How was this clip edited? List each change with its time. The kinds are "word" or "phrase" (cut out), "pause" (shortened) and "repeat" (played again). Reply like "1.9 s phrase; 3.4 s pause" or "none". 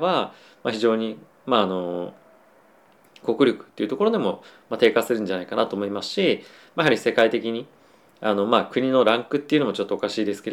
none